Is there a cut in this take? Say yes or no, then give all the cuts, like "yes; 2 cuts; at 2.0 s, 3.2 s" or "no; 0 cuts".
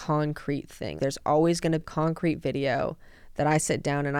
yes; 2 cuts; at 1.0 s, 1.8 s